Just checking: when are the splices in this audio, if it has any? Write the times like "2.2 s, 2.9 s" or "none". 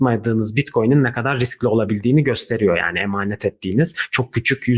none